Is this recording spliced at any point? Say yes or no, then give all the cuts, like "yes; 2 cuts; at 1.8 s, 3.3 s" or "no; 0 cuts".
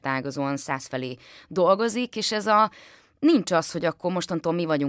no; 0 cuts